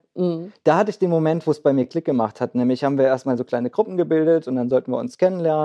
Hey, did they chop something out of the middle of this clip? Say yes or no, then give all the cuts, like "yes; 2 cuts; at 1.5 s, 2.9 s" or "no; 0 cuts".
no; 0 cuts